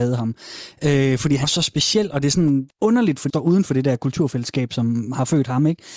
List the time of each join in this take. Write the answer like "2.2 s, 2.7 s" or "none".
1.4 s, 2.7 s, 3.3 s